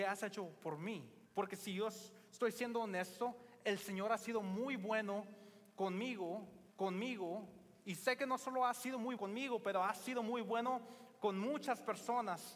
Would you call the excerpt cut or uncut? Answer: cut